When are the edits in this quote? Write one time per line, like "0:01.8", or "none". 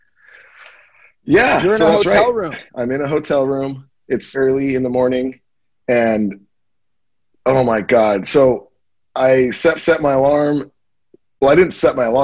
0:02.7
0:04.3
0:09.8